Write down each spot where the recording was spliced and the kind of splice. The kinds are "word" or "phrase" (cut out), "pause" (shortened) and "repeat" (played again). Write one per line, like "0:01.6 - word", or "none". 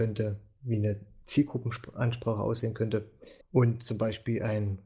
0:03.4 - pause